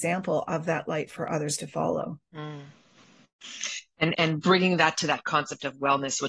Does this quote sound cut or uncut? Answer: cut